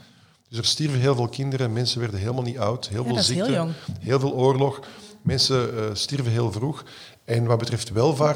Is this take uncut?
yes; 0 cuts

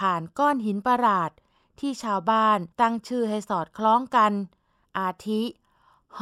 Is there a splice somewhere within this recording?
yes; 1 cut; at 2.7 s

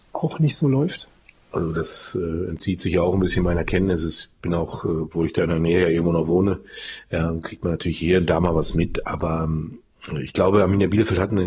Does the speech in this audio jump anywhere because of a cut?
no; 0 cuts

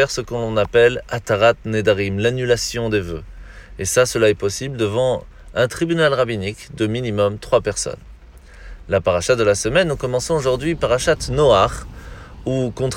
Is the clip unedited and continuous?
yes; 0 cuts

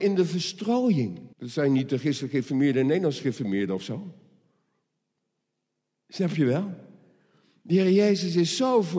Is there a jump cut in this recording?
yes; 1 cut; at 1.3 s

